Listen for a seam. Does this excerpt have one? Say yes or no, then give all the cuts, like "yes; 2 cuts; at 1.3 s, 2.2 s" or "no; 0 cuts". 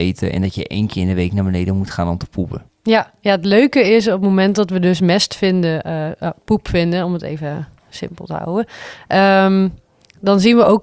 no; 0 cuts